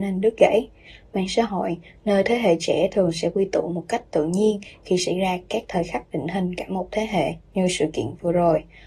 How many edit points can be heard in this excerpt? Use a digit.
0